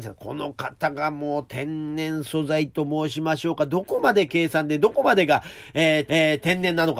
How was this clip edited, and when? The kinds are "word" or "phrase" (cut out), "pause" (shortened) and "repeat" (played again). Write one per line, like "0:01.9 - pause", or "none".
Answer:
0:06.1 - repeat